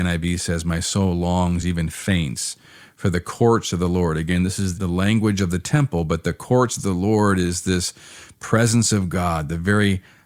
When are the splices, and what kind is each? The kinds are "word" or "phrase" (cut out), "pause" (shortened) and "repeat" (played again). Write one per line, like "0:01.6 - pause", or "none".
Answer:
none